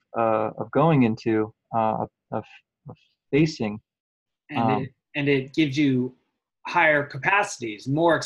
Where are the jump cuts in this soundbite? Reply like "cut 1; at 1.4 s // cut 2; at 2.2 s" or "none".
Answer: none

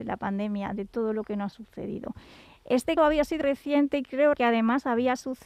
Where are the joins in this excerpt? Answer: cut 1; at 1.5 s // cut 2; at 3.0 s // cut 3; at 3.4 s // cut 4; at 4.3 s

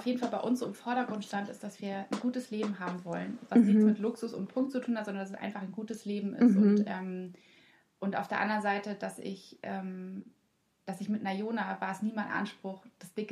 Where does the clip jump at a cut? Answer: none

